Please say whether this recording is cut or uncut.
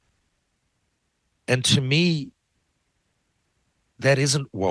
uncut